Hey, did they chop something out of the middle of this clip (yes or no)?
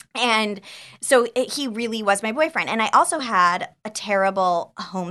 no